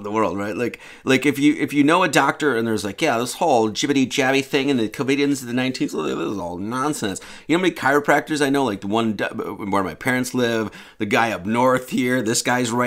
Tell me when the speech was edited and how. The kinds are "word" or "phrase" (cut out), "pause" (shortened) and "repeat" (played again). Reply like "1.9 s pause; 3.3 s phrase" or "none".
none